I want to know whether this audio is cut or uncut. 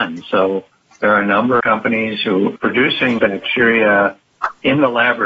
cut